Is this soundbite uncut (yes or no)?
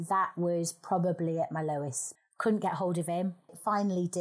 yes